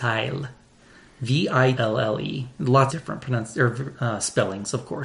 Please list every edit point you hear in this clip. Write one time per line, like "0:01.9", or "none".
0:01.8
0:02.9